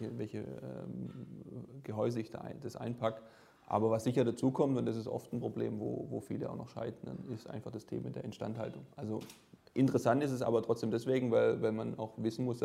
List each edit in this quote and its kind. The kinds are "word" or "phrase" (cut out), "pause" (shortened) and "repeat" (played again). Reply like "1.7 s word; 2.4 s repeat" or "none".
8.9 s pause